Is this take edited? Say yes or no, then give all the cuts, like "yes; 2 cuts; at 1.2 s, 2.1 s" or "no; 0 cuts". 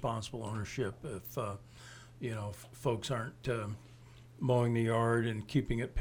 no; 0 cuts